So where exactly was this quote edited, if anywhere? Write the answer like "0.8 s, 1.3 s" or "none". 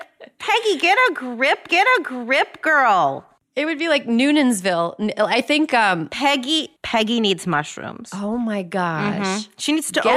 1.7 s, 6.8 s